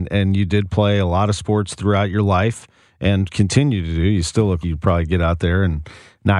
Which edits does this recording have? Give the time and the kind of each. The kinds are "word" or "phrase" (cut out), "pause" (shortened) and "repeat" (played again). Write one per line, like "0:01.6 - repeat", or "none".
0:04.6 - word